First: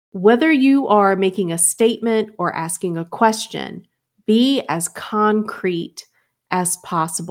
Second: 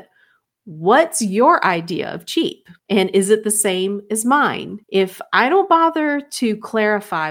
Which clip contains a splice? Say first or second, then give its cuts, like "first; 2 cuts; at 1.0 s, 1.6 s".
second; 2 cuts; at 2.8 s, 4.8 s